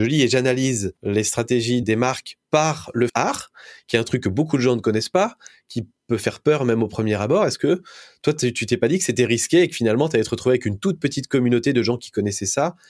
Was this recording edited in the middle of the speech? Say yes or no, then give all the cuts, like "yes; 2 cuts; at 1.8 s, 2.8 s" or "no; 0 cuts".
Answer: yes; 4 cuts; at 1.0 s, 1.8 s, 2.4 s, 3.1 s